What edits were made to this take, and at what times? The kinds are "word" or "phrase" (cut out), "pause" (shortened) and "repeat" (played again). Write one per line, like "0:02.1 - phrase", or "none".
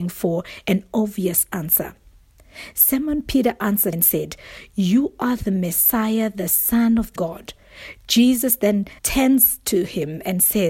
0:03.9 - word
0:07.2 - word
0:09.0 - pause